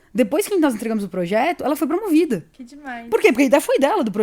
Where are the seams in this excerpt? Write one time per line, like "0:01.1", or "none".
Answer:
0:02.5